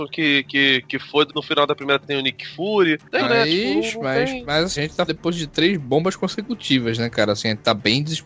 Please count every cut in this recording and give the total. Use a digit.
5